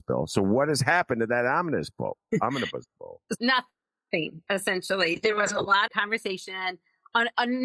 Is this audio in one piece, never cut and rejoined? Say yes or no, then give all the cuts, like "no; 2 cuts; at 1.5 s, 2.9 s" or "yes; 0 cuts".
no; 2 cuts; at 3.4 s, 5.9 s